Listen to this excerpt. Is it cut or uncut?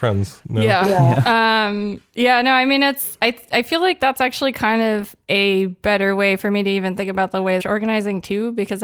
cut